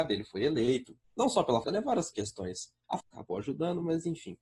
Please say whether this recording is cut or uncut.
cut